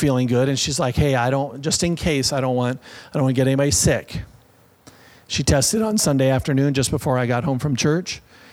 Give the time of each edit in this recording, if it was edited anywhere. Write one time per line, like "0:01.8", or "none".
none